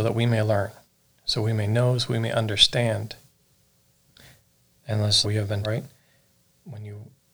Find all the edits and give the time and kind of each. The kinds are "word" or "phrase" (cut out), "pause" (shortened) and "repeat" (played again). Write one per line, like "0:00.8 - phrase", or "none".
0:05.2 - word
0:05.6 - word